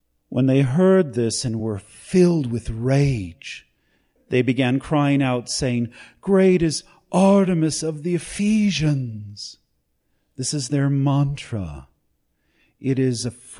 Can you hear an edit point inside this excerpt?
no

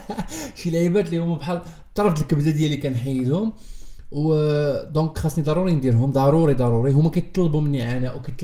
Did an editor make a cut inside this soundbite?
no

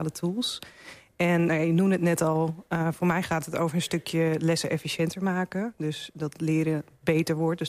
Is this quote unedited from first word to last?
yes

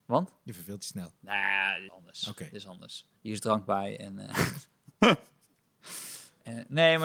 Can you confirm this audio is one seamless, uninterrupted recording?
no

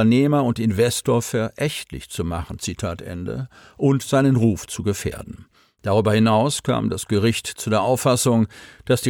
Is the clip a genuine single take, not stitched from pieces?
yes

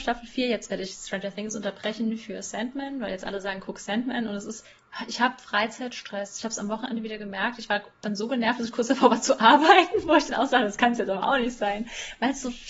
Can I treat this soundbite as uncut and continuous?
yes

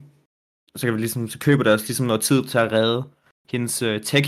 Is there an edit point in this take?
no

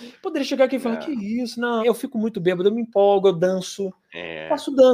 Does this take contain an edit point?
yes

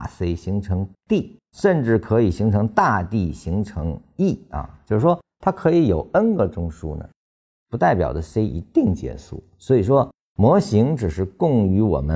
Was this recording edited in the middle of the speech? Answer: no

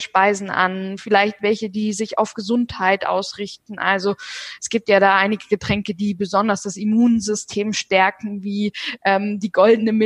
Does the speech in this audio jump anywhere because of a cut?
no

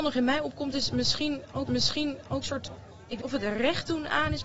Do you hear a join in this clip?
yes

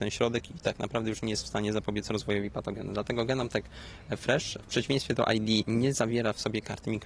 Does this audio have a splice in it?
no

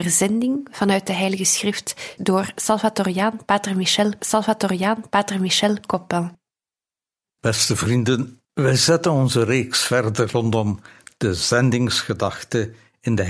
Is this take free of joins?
no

